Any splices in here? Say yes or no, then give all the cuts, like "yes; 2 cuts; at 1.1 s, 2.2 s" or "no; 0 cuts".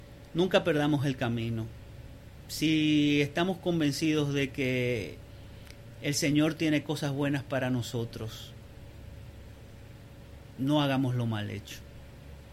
no; 0 cuts